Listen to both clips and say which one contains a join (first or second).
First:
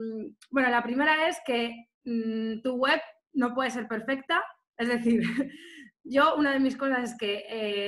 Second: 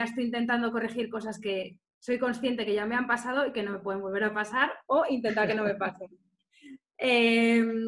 first